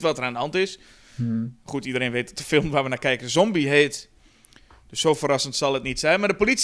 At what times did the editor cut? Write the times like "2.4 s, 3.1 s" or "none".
none

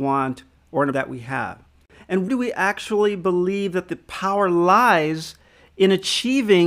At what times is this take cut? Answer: 0.9 s, 2.3 s

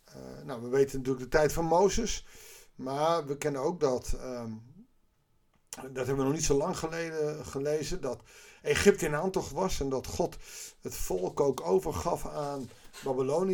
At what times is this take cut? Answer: none

